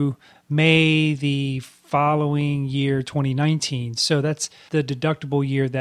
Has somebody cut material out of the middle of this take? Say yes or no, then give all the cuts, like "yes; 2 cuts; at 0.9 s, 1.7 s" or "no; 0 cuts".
no; 0 cuts